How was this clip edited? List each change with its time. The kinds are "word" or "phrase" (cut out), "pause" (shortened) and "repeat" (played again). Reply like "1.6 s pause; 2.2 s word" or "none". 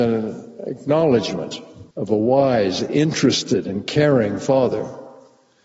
1.9 s pause